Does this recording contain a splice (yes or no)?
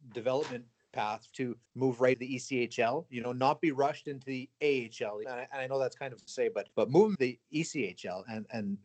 yes